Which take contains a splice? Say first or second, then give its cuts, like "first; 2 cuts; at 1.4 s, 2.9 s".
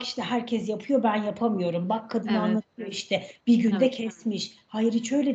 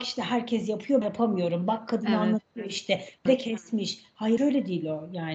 second; 3 cuts; at 1.0 s, 3.3 s, 4.4 s